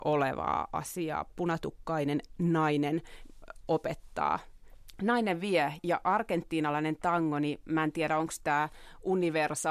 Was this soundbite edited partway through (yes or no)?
no